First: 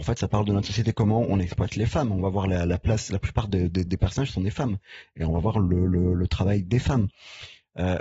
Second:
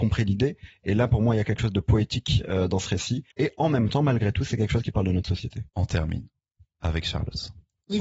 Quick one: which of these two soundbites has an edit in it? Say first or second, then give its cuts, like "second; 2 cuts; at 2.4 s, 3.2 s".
second; 2 cuts; at 3.3 s, 5.7 s